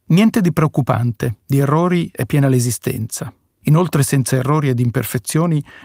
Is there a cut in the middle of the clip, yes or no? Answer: no